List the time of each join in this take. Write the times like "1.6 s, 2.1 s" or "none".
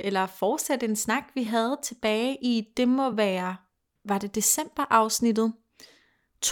none